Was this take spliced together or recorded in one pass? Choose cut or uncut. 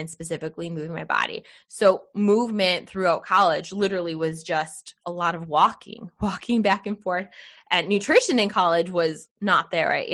uncut